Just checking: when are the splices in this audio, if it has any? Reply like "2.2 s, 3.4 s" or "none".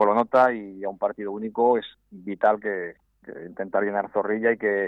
none

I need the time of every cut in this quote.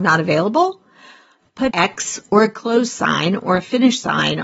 1.7 s

